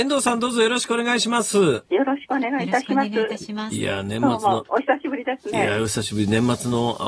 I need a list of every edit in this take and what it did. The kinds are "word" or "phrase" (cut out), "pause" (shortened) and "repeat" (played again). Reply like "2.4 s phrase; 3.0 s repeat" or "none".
1.9 s pause